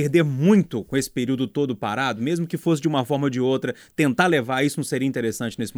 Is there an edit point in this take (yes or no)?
no